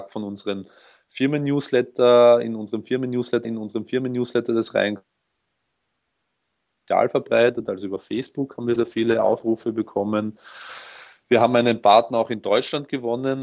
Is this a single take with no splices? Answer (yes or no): no